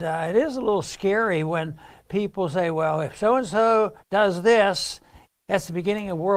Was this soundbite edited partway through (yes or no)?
no